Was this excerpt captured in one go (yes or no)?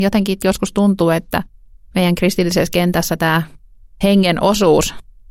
yes